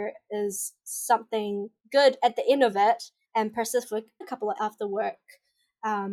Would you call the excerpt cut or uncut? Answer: cut